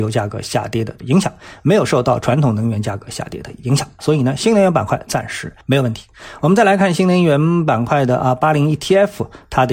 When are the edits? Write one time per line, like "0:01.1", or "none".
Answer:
0:05.6

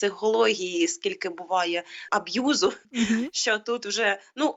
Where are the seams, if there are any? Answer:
0:02.1
0:02.8

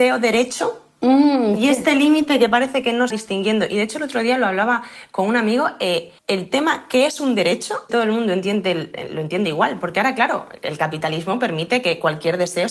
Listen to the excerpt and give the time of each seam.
0:03.1
0:06.2
0:07.9

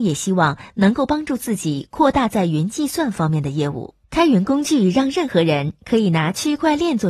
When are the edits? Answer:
0:04.0

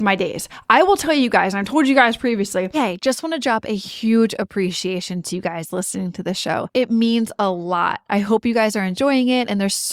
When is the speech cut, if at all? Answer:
0:02.7

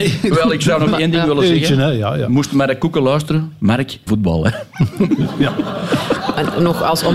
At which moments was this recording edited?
0:04.1

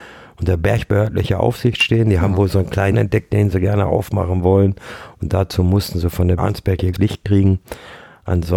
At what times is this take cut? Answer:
0:02.9
0:06.4
0:06.9

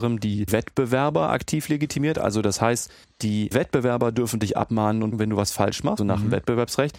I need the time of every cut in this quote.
0:03.0
0:05.1
0:06.0

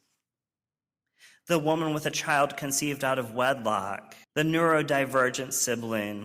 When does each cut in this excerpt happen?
0:04.2

